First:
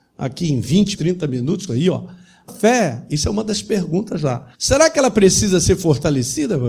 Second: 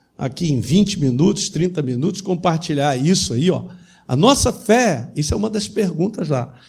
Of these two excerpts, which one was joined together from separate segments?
first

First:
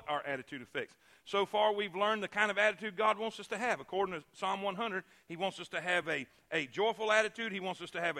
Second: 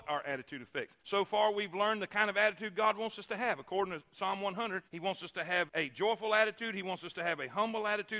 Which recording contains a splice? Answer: second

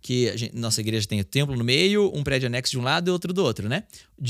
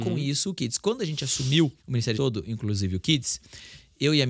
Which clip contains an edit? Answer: second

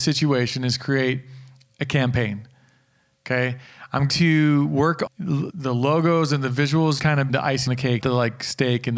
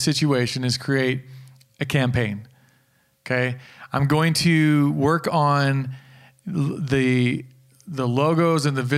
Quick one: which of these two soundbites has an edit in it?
first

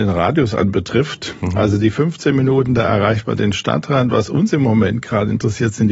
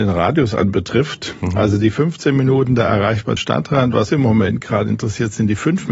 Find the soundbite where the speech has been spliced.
second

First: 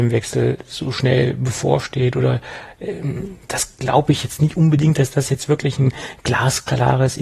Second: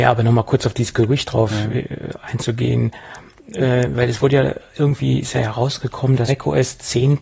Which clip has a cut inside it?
second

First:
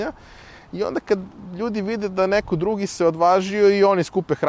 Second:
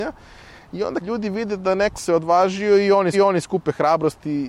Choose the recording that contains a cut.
second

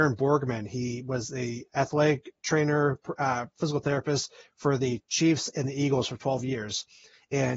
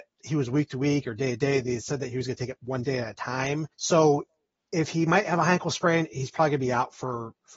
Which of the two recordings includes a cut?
second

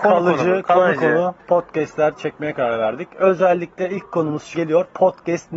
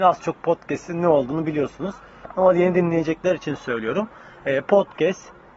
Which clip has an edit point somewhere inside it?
first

